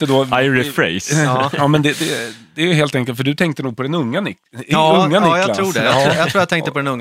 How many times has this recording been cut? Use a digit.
0